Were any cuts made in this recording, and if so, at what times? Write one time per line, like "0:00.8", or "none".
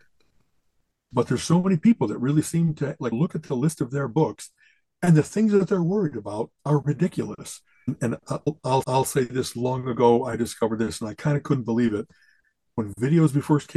0:06.6
0:08.8